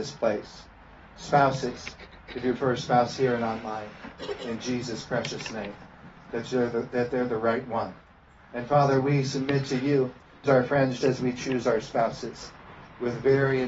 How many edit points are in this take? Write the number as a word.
three